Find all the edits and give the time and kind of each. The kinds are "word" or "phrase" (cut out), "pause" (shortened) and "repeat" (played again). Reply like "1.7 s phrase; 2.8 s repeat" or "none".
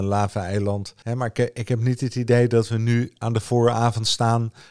1.0 s pause